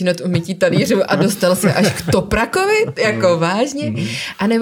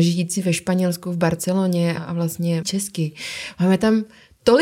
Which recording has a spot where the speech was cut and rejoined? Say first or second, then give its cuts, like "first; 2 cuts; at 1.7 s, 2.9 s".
second; 2 cuts; at 2.0 s, 2.6 s